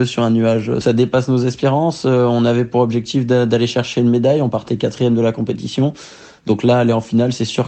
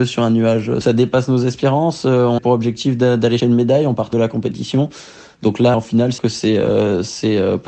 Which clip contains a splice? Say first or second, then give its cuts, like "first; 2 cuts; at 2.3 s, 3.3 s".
second; 5 cuts; at 2.4 s, 3.4 s, 4.1 s, 5.7 s, 6.2 s